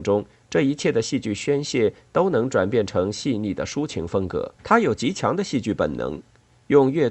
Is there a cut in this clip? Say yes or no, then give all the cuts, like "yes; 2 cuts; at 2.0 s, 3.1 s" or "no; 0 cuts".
yes; 1 cut; at 4.6 s